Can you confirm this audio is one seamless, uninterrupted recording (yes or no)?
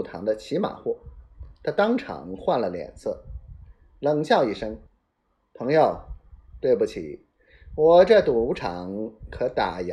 no